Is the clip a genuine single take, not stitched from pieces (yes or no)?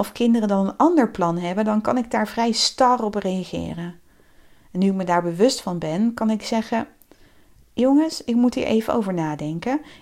yes